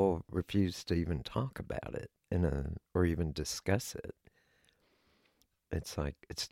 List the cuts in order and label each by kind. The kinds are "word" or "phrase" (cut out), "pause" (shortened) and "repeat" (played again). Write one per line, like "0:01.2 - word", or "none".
0:02.1 - pause
0:02.8 - pause